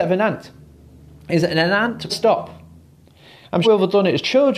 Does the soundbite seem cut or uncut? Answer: cut